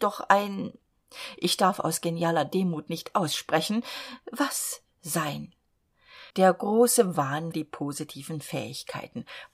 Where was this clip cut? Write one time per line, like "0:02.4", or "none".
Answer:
0:06.3
0:07.5